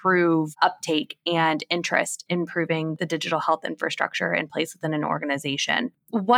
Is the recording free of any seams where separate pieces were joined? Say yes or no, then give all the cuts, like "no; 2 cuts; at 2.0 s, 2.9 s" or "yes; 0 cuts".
no; 1 cut; at 2.3 s